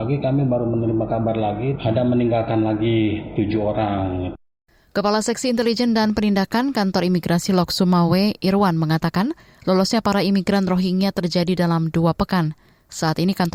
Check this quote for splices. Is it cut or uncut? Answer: uncut